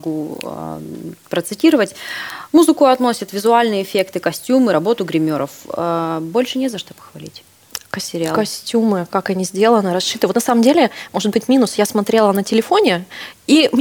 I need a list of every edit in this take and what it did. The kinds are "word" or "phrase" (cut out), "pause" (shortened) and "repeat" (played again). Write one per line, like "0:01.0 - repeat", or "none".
none